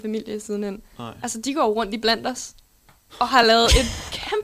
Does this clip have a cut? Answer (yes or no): no